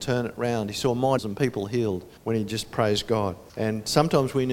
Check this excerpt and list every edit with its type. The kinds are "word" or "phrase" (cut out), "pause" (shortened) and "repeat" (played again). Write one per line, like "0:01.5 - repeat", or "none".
0:01.2 - word
0:02.2 - pause
0:03.5 - pause

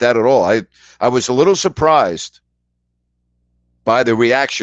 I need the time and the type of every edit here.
none

